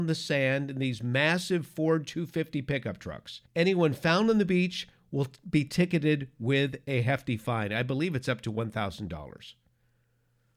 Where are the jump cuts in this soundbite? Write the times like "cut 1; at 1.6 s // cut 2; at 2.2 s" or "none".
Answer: cut 1; at 3.5 s